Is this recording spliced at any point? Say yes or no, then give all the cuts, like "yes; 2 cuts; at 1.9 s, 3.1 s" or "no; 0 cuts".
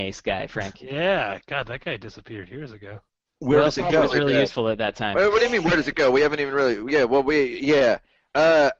no; 0 cuts